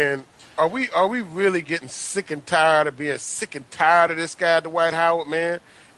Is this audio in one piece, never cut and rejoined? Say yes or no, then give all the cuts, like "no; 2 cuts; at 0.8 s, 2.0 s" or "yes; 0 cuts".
yes; 0 cuts